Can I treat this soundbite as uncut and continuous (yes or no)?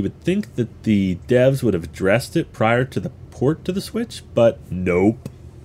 yes